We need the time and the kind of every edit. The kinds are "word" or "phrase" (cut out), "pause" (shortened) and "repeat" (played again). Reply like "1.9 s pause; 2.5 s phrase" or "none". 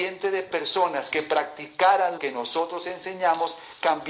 2.2 s word